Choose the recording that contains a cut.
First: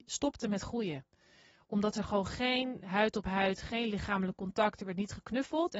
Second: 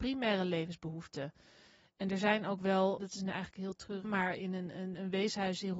second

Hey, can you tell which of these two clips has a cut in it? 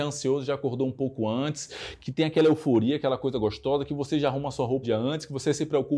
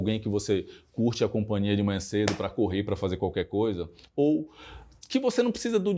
first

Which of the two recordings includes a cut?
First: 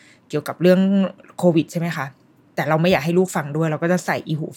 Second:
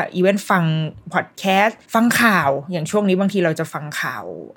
second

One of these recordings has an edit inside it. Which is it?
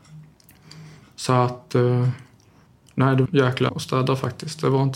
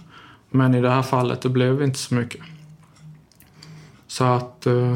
first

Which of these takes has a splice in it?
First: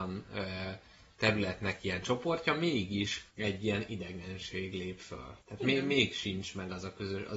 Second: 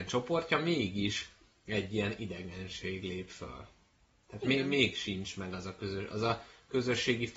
first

